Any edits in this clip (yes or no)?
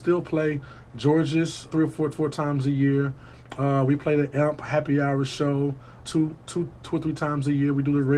yes